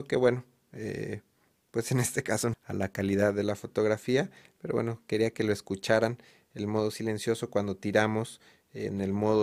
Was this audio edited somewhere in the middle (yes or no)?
yes